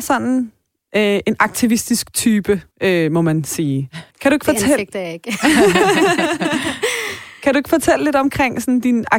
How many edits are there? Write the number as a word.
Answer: two